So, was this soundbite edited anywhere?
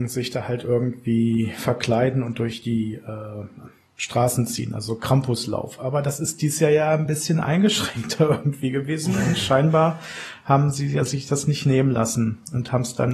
no; 0 cuts

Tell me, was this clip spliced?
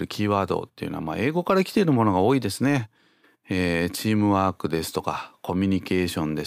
no; 0 cuts

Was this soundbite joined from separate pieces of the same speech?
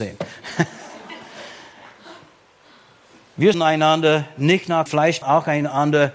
yes; 3 cuts; at 3.5 s, 4.9 s, 5.2 s

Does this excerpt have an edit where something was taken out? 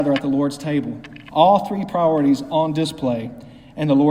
no; 0 cuts

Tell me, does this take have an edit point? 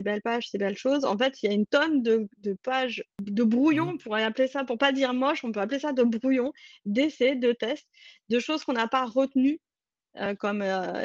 no; 0 cuts

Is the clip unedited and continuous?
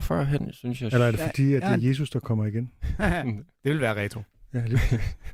yes; 0 cuts

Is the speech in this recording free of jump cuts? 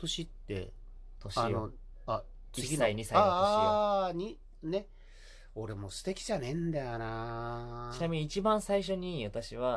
yes; 0 cuts

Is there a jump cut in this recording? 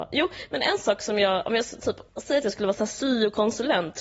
yes; 1 cut; at 2.1 s

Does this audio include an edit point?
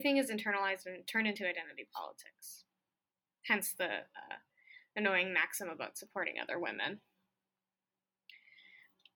no; 0 cuts

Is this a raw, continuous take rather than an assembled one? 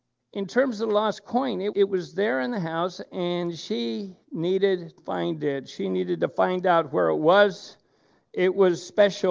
no; 2 cuts; at 1.7 s, 5.0 s

